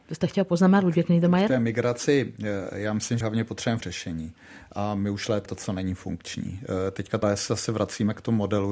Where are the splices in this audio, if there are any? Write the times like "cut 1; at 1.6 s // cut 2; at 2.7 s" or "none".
cut 1; at 3.2 s // cut 2; at 3.8 s // cut 3; at 5.5 s // cut 4; at 7.2 s